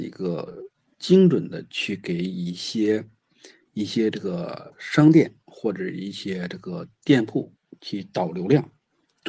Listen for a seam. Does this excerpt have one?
no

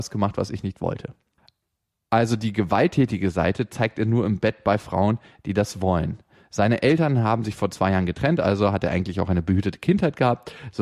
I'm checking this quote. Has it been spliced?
no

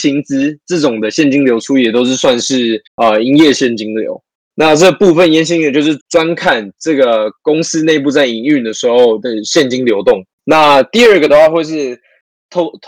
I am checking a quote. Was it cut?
yes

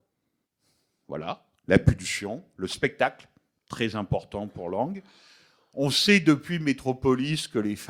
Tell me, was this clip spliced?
no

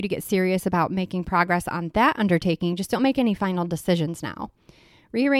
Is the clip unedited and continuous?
yes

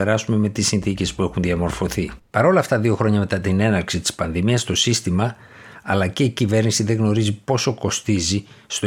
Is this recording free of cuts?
no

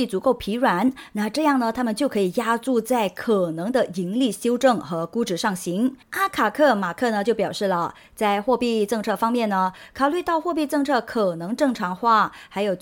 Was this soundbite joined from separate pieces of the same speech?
yes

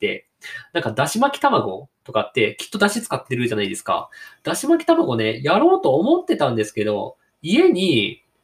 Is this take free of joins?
yes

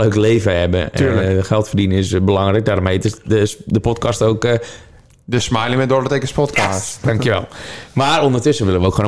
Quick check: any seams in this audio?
no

